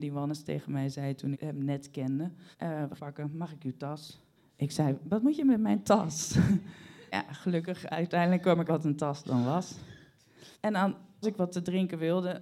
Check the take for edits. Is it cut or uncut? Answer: cut